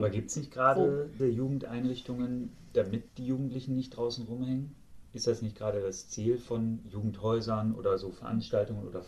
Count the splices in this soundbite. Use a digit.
3